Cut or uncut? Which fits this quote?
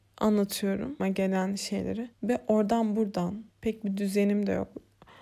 cut